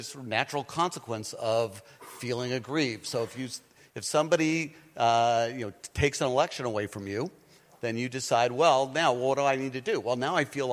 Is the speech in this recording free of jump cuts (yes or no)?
yes